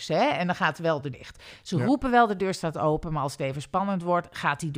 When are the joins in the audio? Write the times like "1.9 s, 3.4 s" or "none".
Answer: 1.1 s